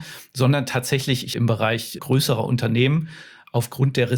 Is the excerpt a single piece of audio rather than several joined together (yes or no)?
no